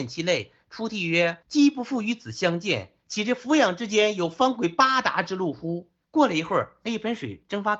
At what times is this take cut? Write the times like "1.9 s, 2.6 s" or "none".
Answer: 1.4 s, 6.0 s